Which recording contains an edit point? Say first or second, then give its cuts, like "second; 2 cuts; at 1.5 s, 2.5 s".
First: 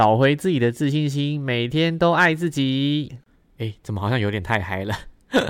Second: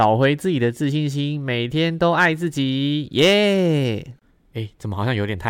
first; 1 cut; at 3.1 s